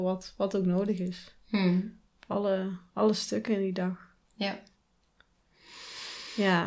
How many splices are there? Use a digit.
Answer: 1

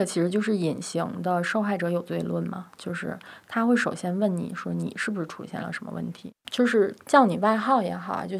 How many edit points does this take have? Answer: 1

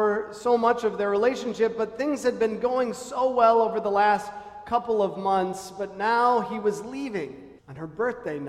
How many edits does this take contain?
1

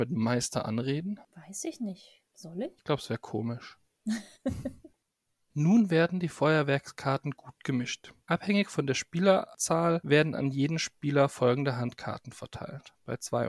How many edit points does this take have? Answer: 3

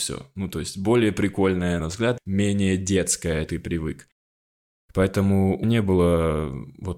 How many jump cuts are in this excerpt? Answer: 4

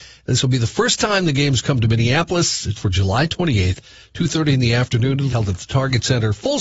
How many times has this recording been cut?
2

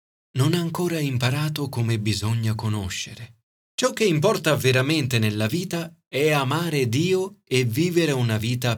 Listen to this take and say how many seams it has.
1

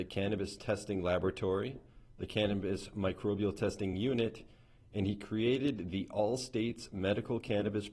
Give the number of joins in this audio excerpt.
0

